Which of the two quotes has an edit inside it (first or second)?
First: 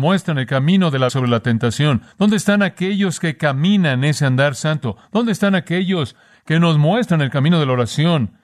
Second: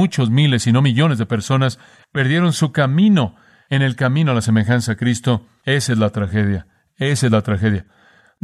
first